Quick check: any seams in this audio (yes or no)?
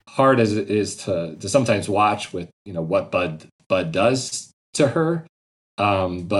no